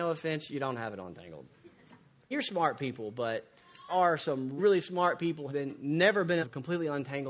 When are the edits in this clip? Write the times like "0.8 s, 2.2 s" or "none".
2.3 s, 3.9 s, 4.6 s, 5.5 s, 6.4 s

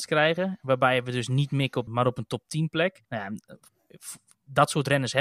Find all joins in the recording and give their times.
1.9 s, 3.0 s

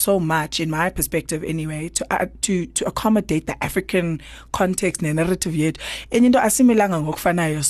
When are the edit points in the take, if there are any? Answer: none

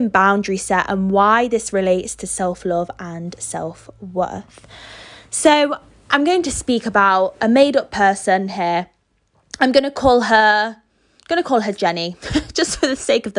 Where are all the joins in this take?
none

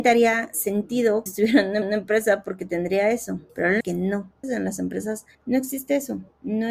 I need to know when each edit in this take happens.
1.3 s, 1.8 s, 3.5 s, 3.8 s, 4.4 s, 5.3 s

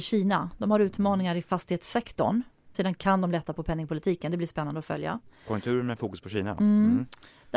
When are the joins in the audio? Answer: 2.7 s

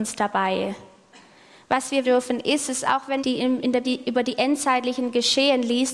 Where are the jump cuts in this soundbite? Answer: 2.0 s, 3.2 s, 3.8 s

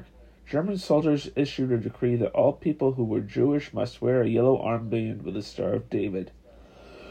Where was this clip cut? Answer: none

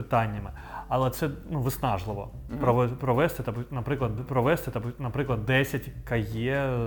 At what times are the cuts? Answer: 4.2 s

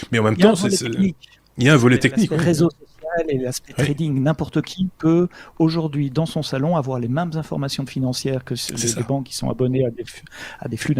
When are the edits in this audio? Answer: none

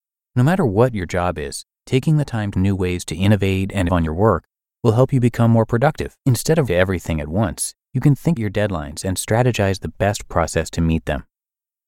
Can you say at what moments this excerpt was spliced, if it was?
2.5 s, 3.9 s, 6.2 s, 6.7 s, 7.8 s, 8.4 s

